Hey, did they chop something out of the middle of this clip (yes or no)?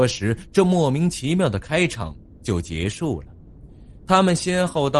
no